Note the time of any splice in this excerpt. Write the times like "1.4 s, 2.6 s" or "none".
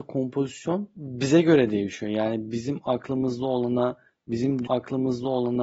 4.6 s